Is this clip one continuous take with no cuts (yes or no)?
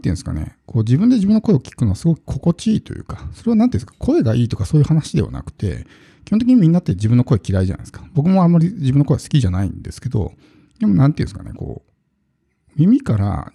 yes